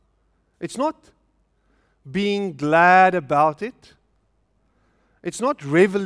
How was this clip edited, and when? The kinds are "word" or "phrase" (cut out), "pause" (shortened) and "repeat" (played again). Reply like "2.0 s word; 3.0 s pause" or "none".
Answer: none